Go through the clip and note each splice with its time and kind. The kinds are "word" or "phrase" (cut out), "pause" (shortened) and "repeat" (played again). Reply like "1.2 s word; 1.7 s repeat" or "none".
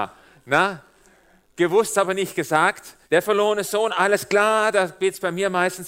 3.0 s pause

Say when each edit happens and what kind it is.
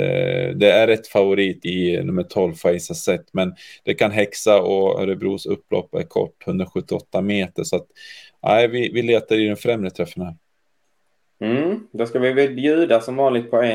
1.6 s word

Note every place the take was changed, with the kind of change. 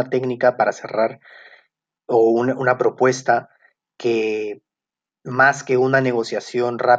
none

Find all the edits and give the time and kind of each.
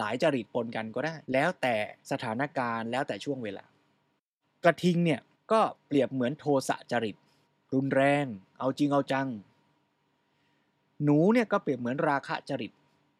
1.2 s pause; 2.0 s pause; 5.3 s pause; 7.4 s pause

